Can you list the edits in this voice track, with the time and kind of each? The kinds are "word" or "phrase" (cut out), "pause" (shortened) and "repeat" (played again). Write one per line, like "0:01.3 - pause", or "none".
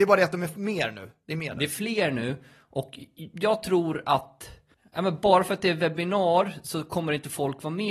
none

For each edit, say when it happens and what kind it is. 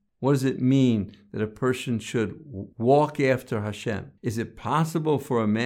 0:02.7 - pause
0:04.2 - pause

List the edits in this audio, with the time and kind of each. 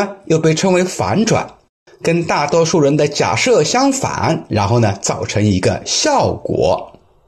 none

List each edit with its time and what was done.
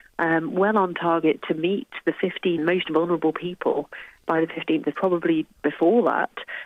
0:02.6 - word
0:04.9 - word
0:05.6 - word

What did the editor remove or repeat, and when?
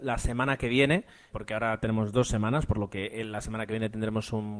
0:01.3 - word

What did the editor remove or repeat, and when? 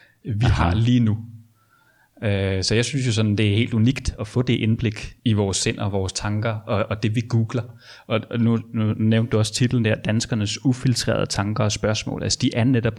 0:05.2 - pause

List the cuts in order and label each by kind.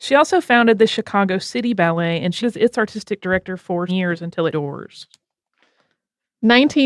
0:02.4 - word
0:03.9 - word
0:04.5 - phrase

